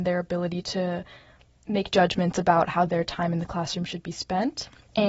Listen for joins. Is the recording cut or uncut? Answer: uncut